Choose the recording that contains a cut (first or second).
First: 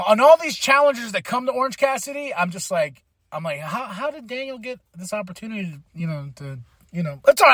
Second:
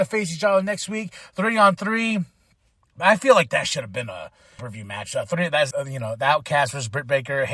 second